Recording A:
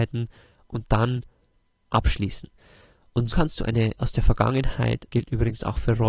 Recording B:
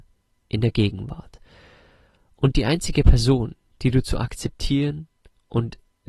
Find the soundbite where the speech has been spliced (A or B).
A